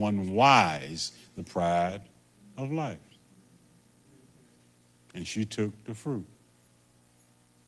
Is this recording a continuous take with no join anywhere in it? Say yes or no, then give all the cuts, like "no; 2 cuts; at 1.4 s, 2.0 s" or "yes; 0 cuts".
yes; 0 cuts